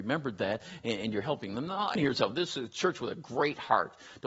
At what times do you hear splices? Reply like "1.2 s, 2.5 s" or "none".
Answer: 2.0 s